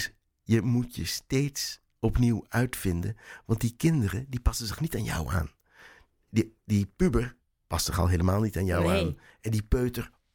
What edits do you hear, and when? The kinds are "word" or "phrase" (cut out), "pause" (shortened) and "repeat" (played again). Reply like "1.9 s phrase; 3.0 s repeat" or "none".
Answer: none